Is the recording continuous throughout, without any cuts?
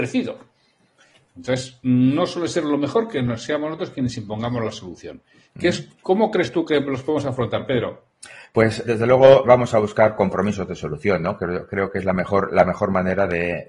no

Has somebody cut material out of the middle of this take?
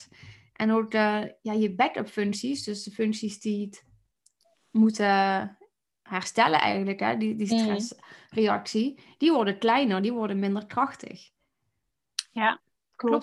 no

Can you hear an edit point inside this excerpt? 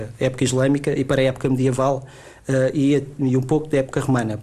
no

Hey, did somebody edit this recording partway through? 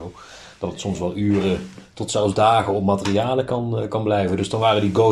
no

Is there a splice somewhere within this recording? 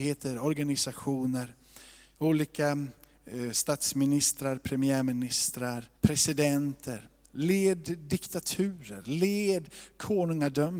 yes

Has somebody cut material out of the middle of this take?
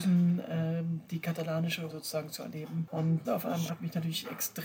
yes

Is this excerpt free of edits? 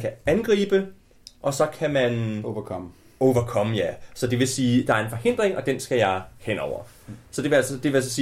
yes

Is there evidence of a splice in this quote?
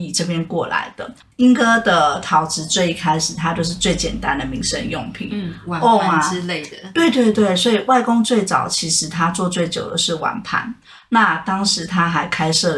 no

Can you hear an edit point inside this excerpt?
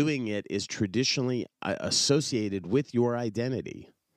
no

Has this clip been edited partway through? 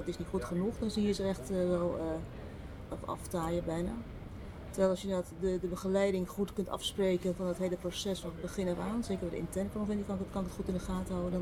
yes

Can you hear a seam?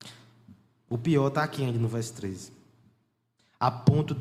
no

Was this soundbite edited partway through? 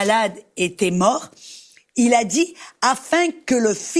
no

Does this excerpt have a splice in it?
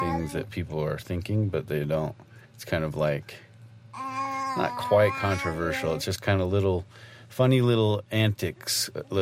yes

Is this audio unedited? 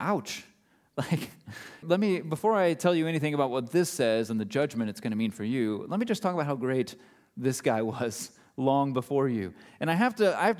no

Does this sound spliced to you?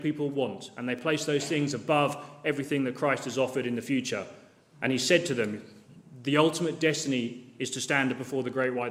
no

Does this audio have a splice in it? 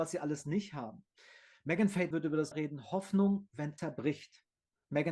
yes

